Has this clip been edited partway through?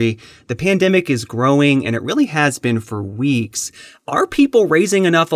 no; 0 cuts

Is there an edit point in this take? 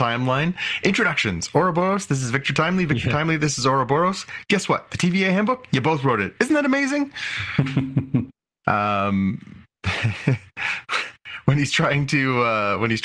no; 0 cuts

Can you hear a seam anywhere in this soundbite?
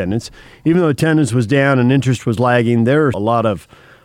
yes; 1 cut; at 3.1 s

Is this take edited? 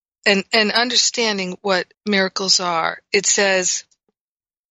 yes; 1 cut; at 1.9 s

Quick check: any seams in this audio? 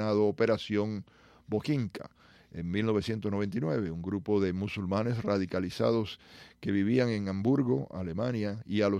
no; 0 cuts

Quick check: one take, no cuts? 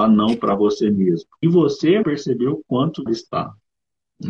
no; 3 cuts; at 1.4 s, 2.0 s, 3.1 s

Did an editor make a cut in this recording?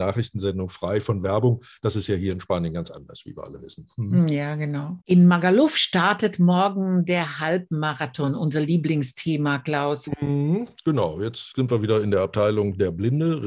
yes; 1 cut; at 5.0 s

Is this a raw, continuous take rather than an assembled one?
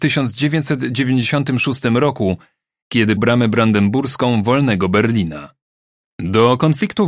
no; 1 cut; at 3.2 s

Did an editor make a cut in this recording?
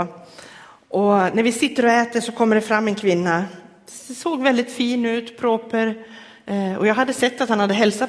no; 0 cuts

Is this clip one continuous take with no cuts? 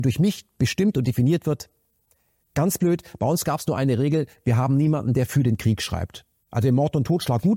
yes; 0 cuts

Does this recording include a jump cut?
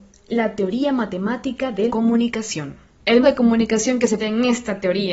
yes; 3 cuts; at 1.9 s, 3.2 s, 4.2 s

